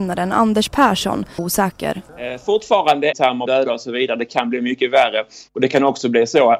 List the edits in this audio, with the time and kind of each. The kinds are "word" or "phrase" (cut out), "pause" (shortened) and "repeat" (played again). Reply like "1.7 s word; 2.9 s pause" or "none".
1.4 s phrase; 2.1 s pause; 3.1 s phrase; 3.5 s phrase